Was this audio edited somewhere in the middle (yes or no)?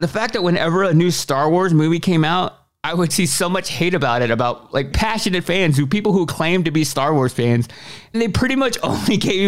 yes